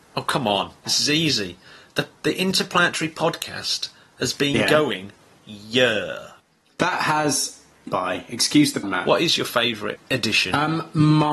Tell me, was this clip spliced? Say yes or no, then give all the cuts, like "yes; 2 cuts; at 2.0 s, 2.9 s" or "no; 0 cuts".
yes; 3 cuts; at 5.4 s, 7.9 s, 8.8 s